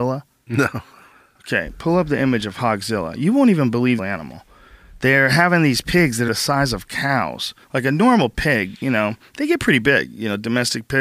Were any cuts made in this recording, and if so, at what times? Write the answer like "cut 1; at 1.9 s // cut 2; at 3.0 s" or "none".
cut 1; at 4.0 s // cut 2; at 6.3 s // cut 3; at 7.6 s